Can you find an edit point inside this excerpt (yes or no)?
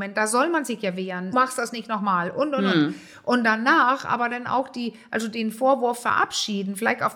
yes